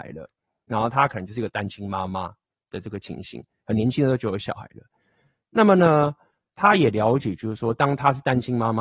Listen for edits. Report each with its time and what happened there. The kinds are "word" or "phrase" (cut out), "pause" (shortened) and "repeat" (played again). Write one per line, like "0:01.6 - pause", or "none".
none